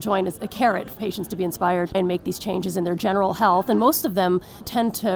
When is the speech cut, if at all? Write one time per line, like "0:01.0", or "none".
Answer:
0:01.0
0:01.9